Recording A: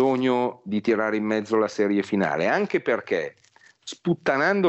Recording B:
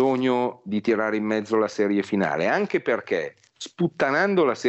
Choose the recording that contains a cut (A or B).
B